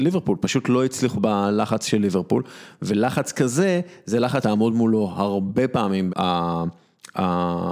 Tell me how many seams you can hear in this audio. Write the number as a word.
three